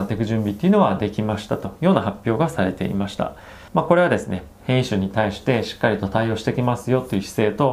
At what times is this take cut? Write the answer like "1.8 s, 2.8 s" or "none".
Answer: 3.7 s, 4.5 s